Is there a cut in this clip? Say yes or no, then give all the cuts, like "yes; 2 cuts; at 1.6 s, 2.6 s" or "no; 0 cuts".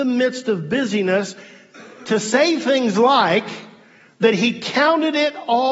no; 0 cuts